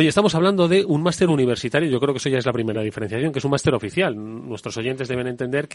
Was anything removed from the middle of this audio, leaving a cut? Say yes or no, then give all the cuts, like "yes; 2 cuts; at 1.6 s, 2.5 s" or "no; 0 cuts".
no; 0 cuts